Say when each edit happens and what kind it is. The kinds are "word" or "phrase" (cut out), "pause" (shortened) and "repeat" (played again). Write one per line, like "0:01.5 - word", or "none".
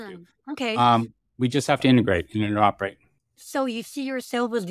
none